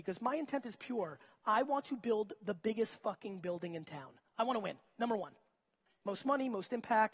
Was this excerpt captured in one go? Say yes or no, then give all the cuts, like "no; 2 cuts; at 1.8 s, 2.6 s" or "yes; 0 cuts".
yes; 0 cuts